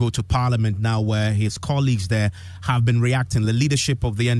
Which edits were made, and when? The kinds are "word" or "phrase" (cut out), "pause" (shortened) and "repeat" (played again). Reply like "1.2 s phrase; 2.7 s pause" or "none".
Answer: none